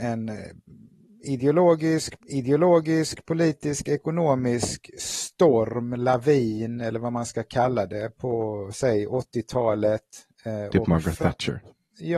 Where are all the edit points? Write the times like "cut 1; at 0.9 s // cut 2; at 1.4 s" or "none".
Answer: cut 1; at 2.2 s